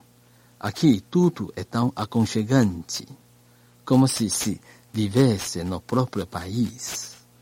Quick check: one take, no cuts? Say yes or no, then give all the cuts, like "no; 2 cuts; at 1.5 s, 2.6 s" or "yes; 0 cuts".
yes; 0 cuts